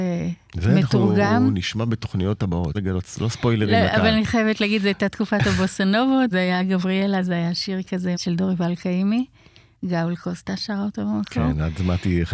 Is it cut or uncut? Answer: cut